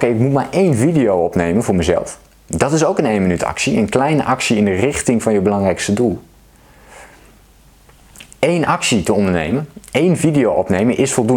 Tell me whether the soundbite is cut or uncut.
uncut